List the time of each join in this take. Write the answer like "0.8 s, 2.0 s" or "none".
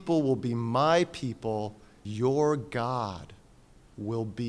2.0 s